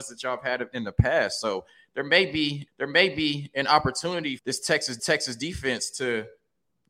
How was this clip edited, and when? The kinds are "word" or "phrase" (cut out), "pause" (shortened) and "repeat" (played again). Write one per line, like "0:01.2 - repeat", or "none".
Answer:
0:02.7 - repeat
0:04.4 - word
0:05.0 - repeat